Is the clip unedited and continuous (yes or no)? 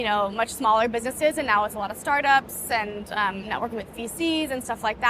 yes